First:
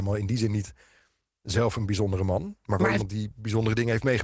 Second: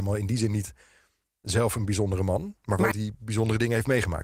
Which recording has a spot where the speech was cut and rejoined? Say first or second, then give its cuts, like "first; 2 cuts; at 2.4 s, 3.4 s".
second; 1 cut; at 2.9 s